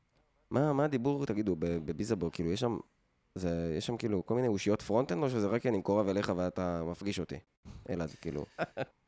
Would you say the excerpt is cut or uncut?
uncut